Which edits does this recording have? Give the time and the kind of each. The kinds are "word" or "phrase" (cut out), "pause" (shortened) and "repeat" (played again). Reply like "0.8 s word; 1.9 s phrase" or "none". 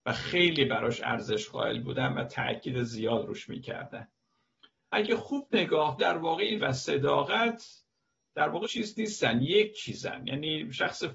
4.9 s word; 6.0 s word; 6.6 s word; 8.6 s word